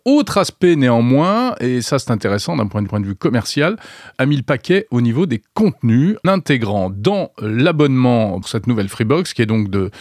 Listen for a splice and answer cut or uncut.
cut